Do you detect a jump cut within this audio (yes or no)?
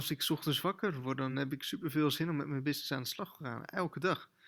no